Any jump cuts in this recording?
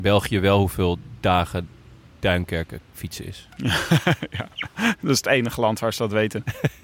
no; 0 cuts

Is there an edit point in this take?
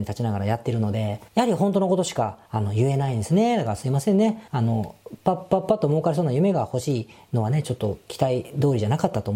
yes; 3 cuts; at 1.3 s, 2.5 s, 4.5 s

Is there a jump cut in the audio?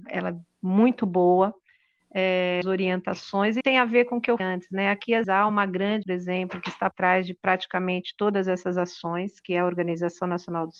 yes; 6 cuts; at 2.6 s, 3.6 s, 4.4 s, 5.2 s, 6.0 s, 6.9 s

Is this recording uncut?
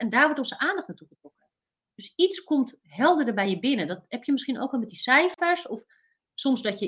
yes; 0 cuts

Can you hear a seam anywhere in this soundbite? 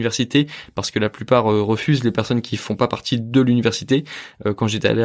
no; 0 cuts

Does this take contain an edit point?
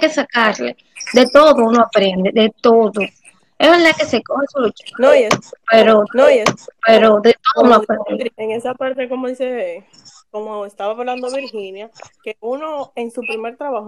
yes; 1 cut; at 6.1 s

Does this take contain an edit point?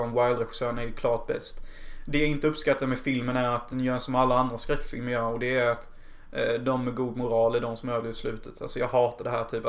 no; 0 cuts

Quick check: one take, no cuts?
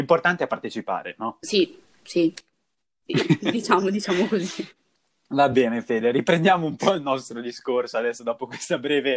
yes; 0 cuts

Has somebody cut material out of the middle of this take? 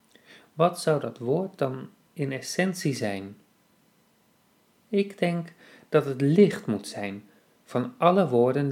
no; 0 cuts

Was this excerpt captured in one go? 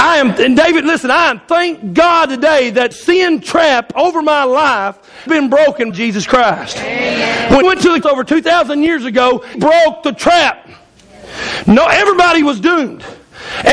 no; 6 cuts; at 2.9 s, 5.3 s, 5.9 s, 7.6 s, 8.0 s, 9.5 s

